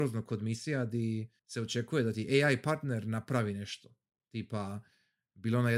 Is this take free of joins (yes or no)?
no